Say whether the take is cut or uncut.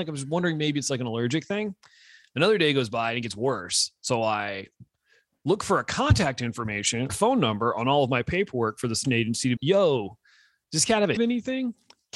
cut